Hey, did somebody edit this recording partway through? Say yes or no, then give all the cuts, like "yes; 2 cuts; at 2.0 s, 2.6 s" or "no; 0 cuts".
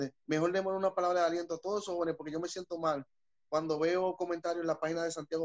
no; 0 cuts